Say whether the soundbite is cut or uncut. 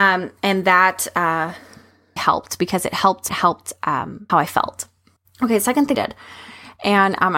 cut